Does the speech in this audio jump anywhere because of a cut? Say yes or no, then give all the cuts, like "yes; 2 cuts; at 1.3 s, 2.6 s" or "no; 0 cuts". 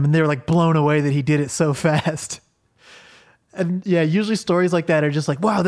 no; 0 cuts